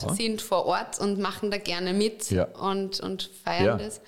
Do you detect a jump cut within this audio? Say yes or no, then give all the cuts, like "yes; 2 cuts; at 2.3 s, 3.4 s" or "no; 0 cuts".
no; 0 cuts